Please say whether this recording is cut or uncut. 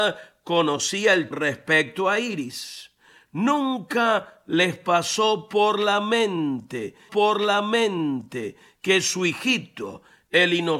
cut